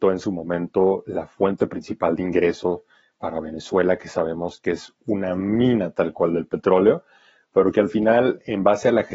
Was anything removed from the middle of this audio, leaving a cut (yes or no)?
no